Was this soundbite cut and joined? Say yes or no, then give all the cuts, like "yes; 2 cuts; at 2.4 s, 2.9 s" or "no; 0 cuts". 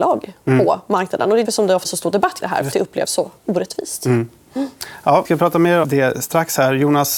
yes; 6 cuts; at 1.4 s, 1.8 s, 2.4 s, 2.7 s, 5.2 s, 5.8 s